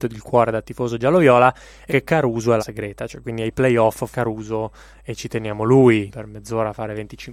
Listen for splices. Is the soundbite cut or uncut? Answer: cut